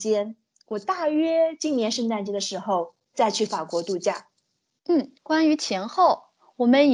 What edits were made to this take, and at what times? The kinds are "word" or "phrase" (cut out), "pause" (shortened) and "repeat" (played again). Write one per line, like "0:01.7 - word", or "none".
0:05.2 - pause